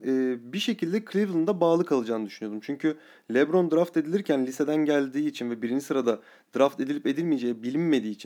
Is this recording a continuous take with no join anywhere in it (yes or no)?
yes